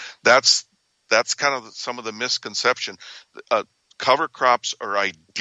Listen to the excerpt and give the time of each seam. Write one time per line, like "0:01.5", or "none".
none